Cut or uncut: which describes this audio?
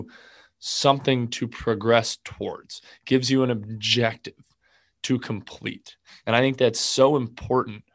uncut